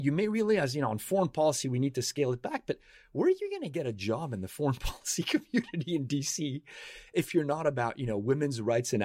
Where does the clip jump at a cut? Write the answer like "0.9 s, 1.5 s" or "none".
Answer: none